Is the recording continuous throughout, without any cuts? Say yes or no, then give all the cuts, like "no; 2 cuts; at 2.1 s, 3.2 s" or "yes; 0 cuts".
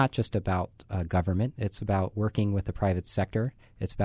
yes; 0 cuts